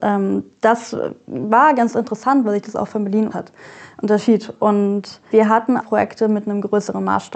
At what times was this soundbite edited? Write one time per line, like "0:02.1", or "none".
0:03.3
0:05.3
0:05.8